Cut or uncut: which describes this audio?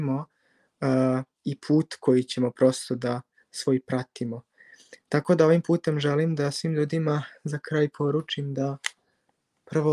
uncut